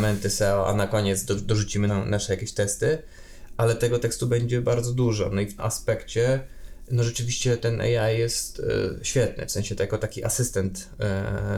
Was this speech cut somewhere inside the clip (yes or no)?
yes